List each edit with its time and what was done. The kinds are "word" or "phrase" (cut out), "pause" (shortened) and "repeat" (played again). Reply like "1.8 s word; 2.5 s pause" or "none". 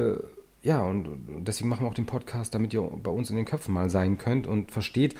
none